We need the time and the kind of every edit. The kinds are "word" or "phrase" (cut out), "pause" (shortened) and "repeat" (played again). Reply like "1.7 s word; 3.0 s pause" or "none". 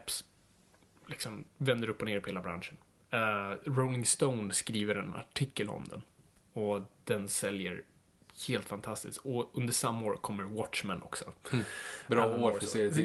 none